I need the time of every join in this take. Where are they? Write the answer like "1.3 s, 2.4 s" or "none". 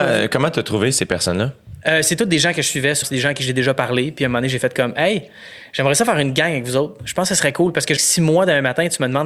3.0 s, 8.0 s